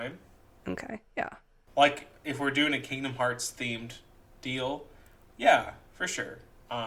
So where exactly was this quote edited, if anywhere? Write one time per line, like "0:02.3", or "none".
none